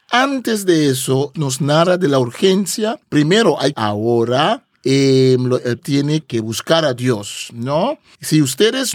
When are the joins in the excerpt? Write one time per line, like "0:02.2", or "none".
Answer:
0:01.3
0:03.0
0:03.7
0:04.7
0:05.8